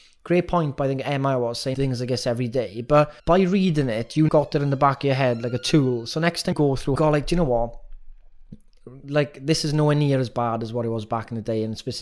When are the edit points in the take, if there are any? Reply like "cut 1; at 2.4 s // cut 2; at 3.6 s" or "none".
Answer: cut 1; at 1.7 s // cut 2; at 3.2 s // cut 3; at 4.3 s // cut 4; at 6.5 s // cut 5; at 7.0 s